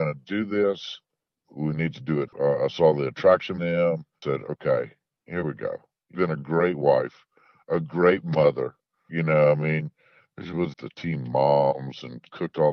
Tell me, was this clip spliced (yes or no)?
yes